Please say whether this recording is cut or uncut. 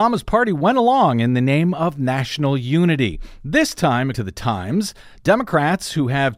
cut